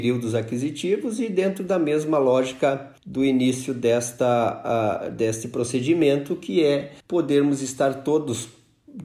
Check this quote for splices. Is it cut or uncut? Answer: cut